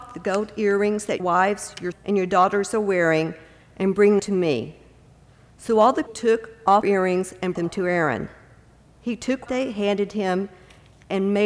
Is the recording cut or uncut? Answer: cut